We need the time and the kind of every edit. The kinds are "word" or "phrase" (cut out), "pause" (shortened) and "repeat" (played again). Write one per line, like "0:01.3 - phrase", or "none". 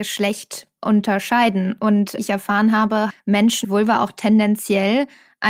0:02.2 - word
0:03.1 - word
0:03.6 - word